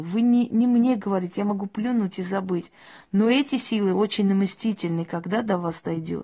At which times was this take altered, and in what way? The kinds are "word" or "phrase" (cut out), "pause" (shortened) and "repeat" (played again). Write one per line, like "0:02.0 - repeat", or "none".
none